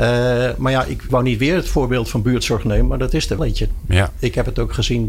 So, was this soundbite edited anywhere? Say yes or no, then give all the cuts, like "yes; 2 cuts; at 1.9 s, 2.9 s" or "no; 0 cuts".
yes; 2 cuts; at 1.1 s, 3.4 s